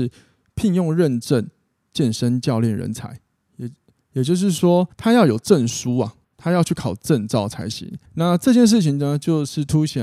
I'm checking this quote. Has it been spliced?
yes; 3 cuts; at 4.9 s, 6.2 s, 8.1 s

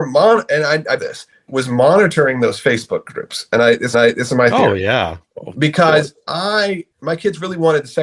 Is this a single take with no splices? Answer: no; 4 cuts; at 1.0 s, 1.5 s, 3.9 s, 6.9 s

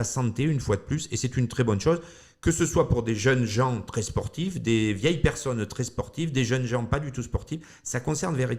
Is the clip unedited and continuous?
yes; 0 cuts

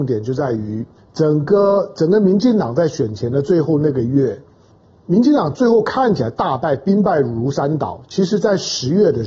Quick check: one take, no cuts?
no; 2 cuts; at 1.0 s, 4.7 s

